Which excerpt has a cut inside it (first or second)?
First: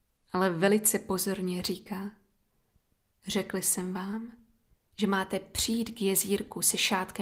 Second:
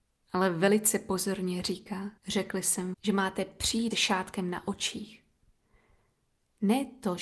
second